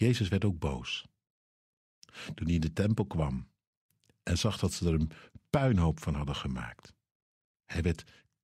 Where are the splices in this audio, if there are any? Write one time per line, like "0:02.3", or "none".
none